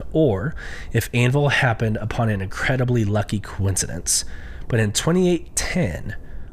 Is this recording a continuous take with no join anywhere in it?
yes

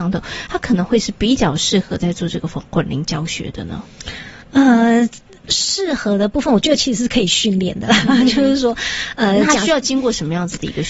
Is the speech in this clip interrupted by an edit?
yes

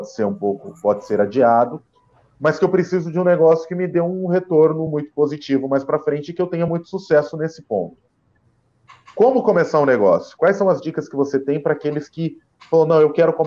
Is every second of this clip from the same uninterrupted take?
yes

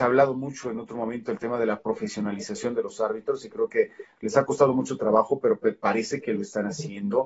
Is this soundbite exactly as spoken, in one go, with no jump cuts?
yes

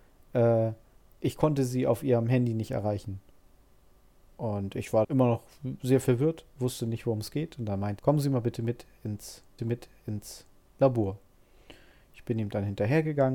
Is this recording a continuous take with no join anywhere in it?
no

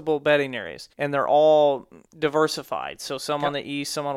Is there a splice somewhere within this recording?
yes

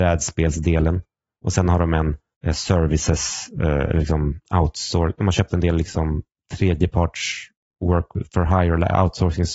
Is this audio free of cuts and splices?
yes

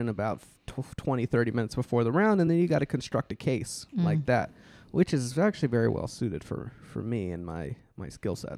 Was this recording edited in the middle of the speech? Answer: no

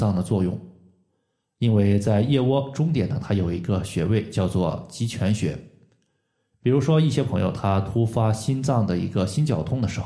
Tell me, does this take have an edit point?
no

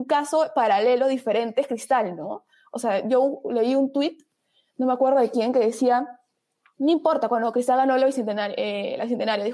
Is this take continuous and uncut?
yes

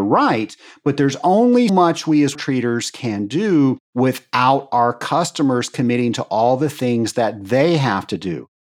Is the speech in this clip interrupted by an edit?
yes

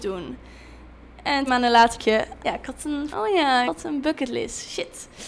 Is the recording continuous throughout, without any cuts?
no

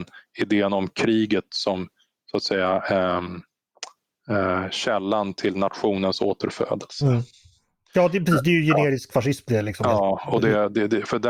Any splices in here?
no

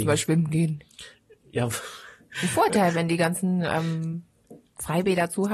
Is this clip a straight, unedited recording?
yes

